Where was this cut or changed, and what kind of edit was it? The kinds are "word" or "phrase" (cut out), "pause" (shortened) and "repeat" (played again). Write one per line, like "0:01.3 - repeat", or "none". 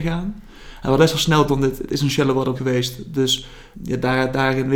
0:01.0 - word
0:01.5 - word
0:02.5 - word
0:03.7 - word